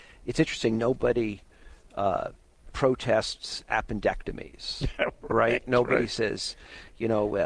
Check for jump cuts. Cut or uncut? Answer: uncut